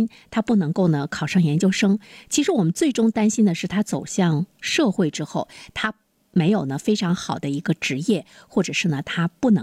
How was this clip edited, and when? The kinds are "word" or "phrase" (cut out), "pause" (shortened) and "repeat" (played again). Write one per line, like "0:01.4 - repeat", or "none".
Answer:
none